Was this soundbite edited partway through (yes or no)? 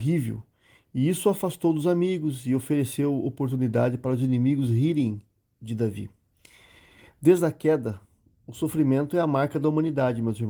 no